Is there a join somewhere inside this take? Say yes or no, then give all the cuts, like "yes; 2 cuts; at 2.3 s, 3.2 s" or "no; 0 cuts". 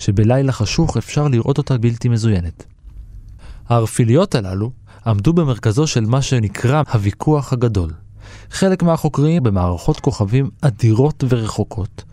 yes; 3 cuts; at 1.8 s, 6.8 s, 9.4 s